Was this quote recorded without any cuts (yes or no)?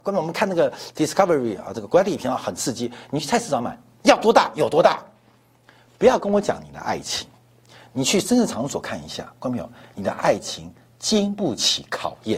yes